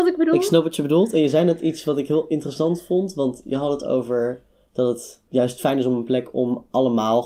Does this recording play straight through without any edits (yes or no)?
yes